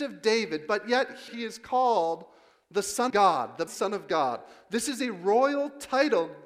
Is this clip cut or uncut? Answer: cut